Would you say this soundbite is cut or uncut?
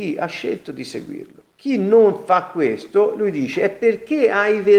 cut